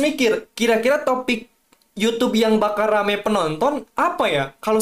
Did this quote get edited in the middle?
no; 0 cuts

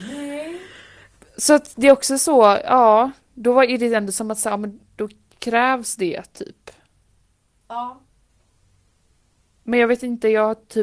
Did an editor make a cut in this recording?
no; 0 cuts

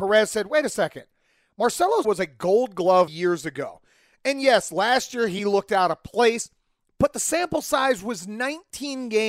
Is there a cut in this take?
yes; 3 cuts; at 2.0 s, 3.1 s, 5.4 s

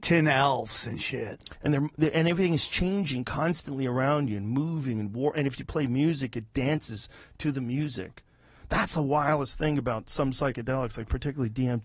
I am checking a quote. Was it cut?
no; 0 cuts

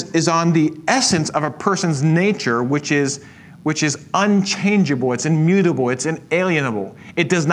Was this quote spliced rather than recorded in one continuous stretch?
no; 0 cuts

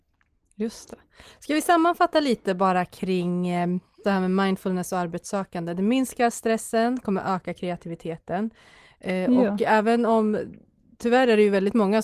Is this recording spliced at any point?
yes; 1 cut; at 4.0 s

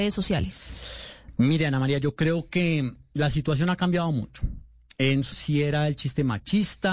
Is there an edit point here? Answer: yes; 1 cut; at 5.3 s

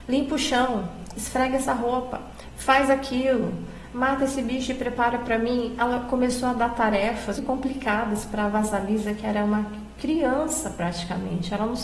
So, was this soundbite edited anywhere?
yes; 1 cut; at 7.4 s

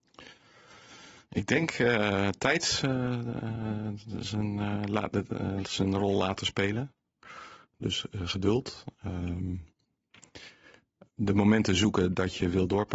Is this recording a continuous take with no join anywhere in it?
yes; 0 cuts

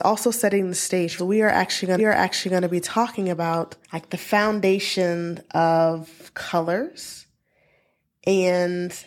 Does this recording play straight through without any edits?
no; 3 cuts; at 1.2 s, 2.0 s, 3.8 s

